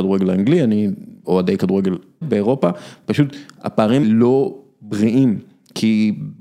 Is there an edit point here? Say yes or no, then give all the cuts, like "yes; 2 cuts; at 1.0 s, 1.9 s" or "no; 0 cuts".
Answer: yes; 3 cuts; at 1.2 s, 2.2 s, 4.0 s